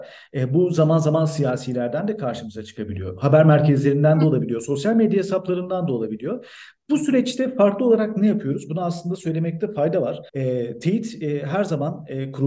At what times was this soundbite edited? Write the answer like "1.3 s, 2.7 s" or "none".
10.3 s